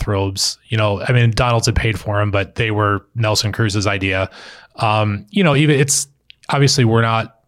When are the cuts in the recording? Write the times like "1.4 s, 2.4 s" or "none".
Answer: none